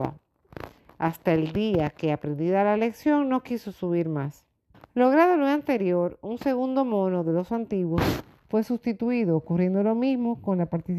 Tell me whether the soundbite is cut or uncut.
cut